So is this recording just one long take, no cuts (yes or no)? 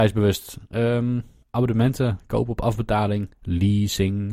no